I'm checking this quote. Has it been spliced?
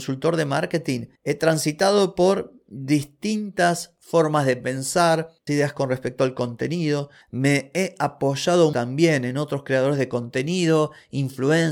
yes; 3 cuts; at 5.5 s, 7.2 s, 8.7 s

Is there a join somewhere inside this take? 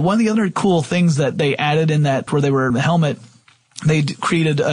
yes; 2 cuts; at 2.3 s, 2.7 s

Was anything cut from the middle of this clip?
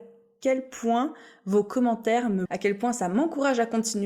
yes; 1 cut; at 2.5 s

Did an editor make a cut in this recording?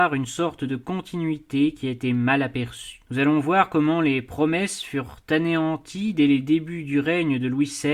yes; 1 cut; at 3.0 s

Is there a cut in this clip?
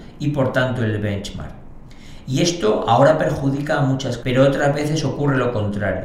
yes; 1 cut; at 4.2 s

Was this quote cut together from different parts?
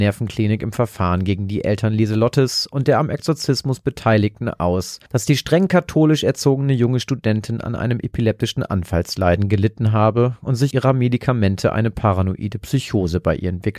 yes; 2 cuts; at 5.1 s, 10.7 s

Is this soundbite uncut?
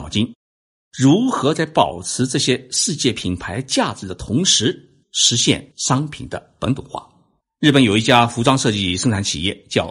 no; 3 cuts; at 5.0 s, 5.7 s, 7.4 s

